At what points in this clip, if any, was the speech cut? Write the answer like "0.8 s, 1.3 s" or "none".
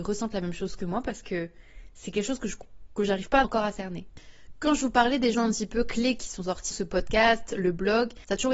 3.4 s, 5.3 s, 6.7 s